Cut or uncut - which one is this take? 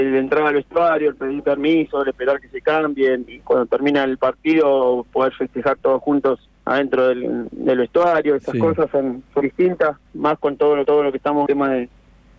cut